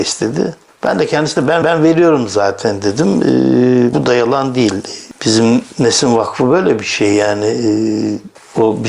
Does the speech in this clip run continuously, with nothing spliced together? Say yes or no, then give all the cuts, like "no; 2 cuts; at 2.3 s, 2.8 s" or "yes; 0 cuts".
no; 2 cuts; at 1.6 s, 3.9 s